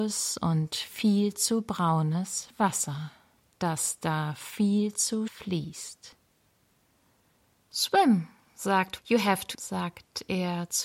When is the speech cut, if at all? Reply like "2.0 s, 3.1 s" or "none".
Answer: 3.4 s, 5.3 s, 9.0 s, 9.5 s